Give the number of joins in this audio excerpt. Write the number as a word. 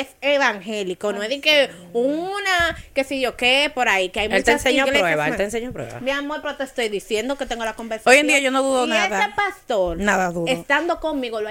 zero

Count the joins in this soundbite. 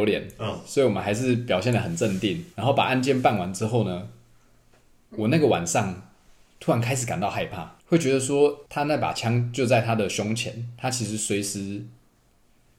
three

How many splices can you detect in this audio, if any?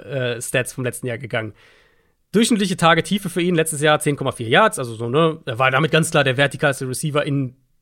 zero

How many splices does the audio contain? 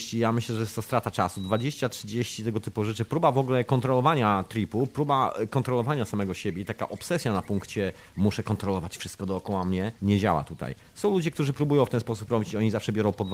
one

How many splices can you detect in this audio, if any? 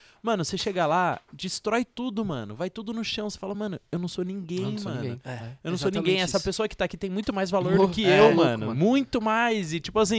zero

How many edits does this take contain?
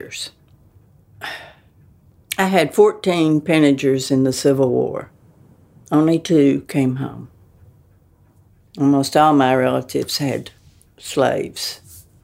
zero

